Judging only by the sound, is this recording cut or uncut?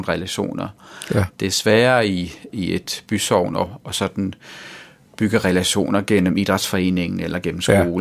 uncut